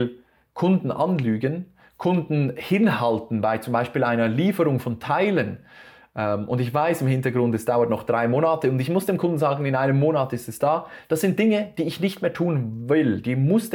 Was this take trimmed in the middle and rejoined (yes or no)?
no